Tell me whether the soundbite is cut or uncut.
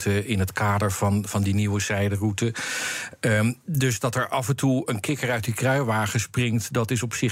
cut